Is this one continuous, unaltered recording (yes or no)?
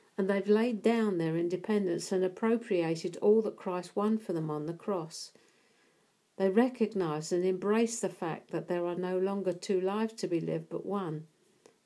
yes